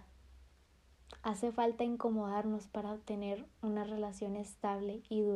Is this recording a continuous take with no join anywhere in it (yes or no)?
yes